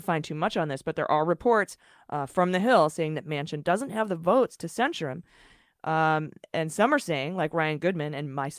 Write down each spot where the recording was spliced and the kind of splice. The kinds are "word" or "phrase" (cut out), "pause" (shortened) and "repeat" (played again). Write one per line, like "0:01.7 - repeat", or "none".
none